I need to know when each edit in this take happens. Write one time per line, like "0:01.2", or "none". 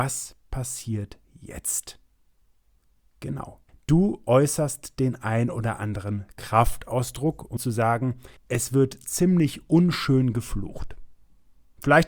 0:01.2
0:03.7
0:07.6
0:08.4

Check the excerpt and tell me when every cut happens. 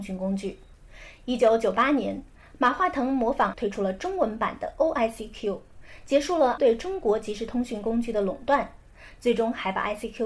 0:03.5
0:06.6

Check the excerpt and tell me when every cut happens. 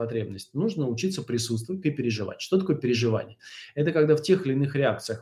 0:01.8

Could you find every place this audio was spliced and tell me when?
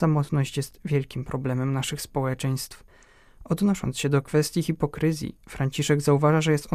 none

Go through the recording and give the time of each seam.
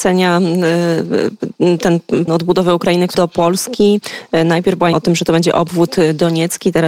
0:02.3
0:03.1
0:04.9

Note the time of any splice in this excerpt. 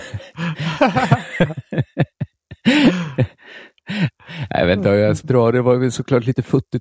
0:05.2

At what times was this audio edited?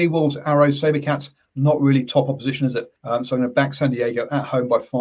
0:03.0

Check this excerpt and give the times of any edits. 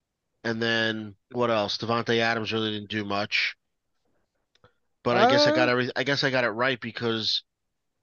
0:01.2

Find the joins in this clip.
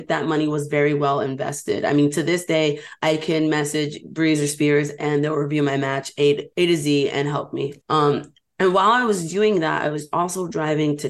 0:06.5
0:07.8

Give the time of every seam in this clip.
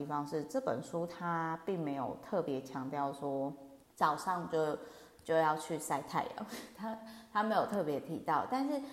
0:03.8

